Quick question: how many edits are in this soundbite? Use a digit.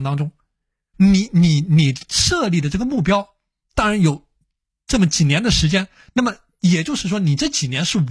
1